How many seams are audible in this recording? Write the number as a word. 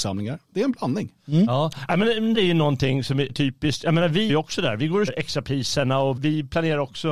five